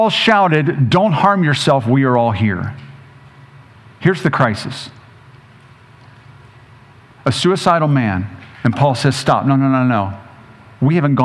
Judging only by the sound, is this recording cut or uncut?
cut